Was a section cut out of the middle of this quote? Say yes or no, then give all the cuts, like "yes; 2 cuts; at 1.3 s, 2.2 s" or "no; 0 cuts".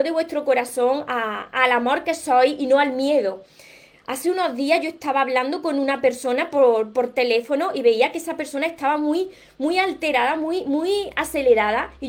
no; 0 cuts